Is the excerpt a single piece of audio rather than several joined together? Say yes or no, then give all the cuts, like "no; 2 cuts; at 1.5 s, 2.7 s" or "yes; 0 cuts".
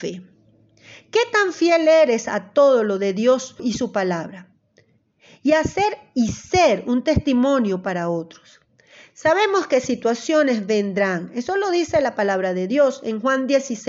yes; 0 cuts